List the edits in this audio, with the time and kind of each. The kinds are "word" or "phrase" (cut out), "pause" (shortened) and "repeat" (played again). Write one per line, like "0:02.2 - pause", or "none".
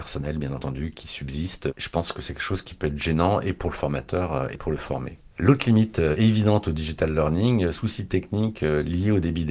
0:05.3 - pause
0:07.7 - phrase